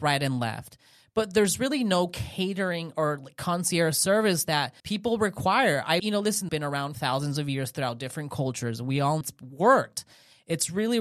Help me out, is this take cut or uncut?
cut